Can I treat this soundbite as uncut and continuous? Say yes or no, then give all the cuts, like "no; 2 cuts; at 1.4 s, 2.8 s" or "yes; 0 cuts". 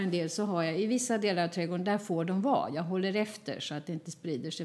yes; 0 cuts